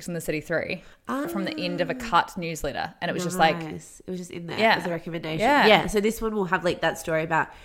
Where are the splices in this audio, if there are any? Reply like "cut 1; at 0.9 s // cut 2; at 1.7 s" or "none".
cut 1; at 1.2 s